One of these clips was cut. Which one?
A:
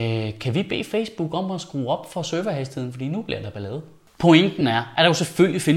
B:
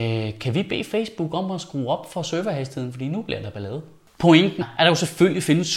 B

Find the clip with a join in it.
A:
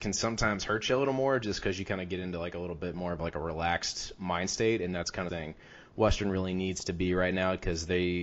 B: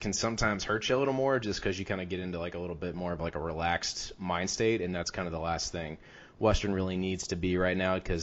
A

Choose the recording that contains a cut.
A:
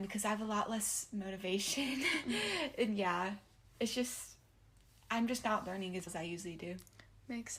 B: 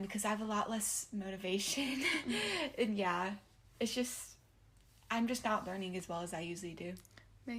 A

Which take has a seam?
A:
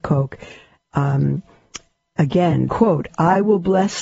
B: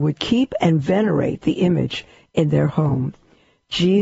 A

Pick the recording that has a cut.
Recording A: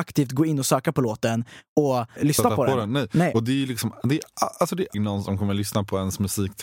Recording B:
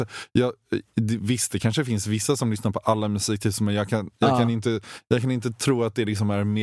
A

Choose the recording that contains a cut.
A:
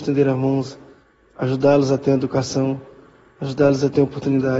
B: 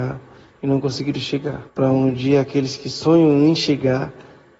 B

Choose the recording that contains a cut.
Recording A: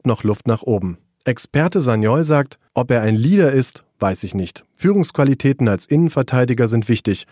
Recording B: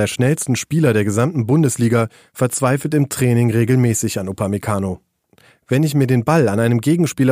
A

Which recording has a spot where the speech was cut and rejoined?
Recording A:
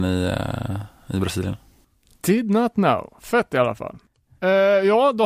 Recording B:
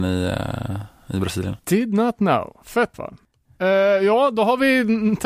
B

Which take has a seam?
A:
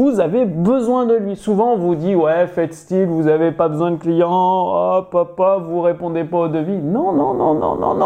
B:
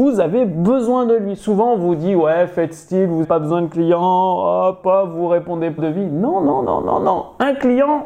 B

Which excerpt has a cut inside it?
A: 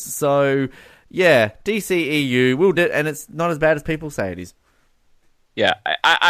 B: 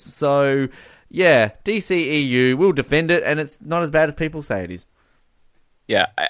A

